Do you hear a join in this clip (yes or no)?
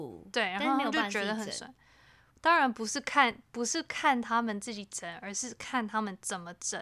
no